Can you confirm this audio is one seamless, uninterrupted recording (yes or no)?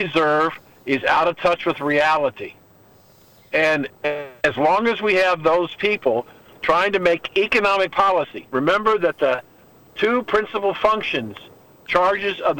yes